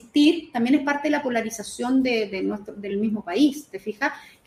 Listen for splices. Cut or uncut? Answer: uncut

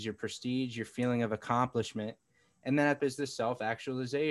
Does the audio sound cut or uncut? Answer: cut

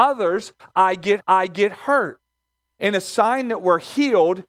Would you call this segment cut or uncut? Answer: cut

